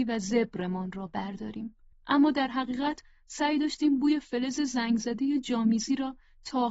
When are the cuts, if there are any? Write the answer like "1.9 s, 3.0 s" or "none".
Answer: 1.9 s